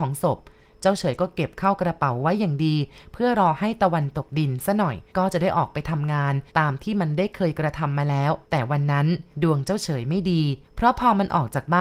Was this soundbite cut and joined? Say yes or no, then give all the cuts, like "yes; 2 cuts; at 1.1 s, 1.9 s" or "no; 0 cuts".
yes; 5 cuts; at 5.1 s, 6.5 s, 8.4 s, 9.3 s, 10.6 s